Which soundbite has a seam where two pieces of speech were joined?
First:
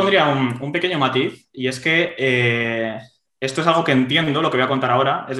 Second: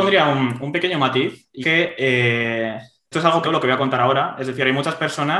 second; 3 cuts; at 1.6 s, 3.1 s, 3.4 s

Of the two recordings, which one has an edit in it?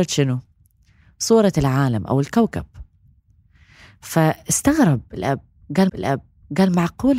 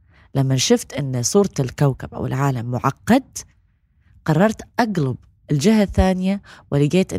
first; 1 cut; at 5.9 s

